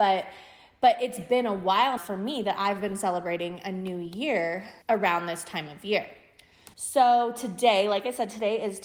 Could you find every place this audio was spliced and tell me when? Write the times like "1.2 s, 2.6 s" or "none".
2.0 s, 4.8 s, 6.7 s